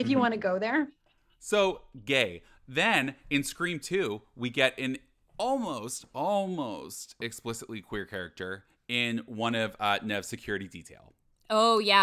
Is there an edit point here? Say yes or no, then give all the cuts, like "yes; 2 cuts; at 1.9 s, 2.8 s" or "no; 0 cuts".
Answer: no; 0 cuts